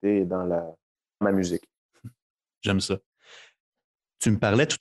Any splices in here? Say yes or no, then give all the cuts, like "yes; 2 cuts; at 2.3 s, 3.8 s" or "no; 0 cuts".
yes; 1 cut; at 1.2 s